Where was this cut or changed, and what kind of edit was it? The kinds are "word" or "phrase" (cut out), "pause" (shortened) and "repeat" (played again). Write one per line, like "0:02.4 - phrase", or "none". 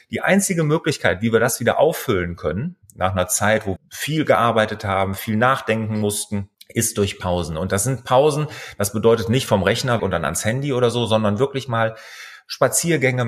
0:02.8 - pause
0:03.8 - phrase
0:06.5 - pause
0:10.0 - word

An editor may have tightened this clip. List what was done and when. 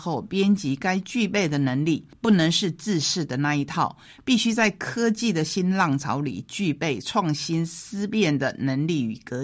none

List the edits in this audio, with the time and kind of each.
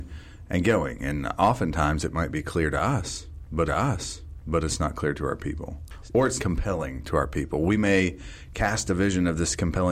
0:03.7 - repeat
0:06.4 - word

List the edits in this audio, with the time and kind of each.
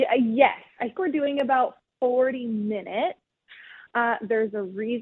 0:01.0 - word

